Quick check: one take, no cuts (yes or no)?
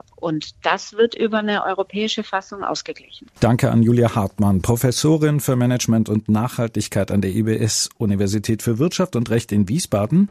yes